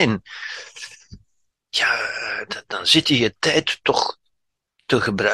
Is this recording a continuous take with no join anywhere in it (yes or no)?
yes